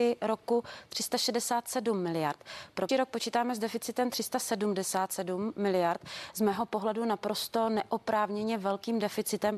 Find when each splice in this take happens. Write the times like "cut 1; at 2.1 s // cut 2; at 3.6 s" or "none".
cut 1; at 2.9 s